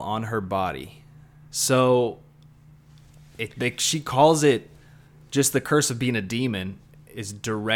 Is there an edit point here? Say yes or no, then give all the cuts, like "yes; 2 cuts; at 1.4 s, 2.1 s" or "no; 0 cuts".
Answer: no; 0 cuts